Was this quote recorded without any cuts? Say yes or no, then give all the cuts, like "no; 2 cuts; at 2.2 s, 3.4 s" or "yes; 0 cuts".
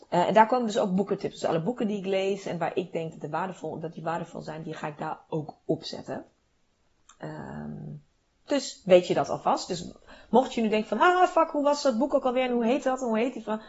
yes; 0 cuts